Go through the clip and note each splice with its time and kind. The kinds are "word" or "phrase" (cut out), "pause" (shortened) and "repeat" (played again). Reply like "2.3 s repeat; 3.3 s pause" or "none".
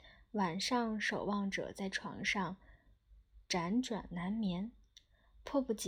3.4 s pause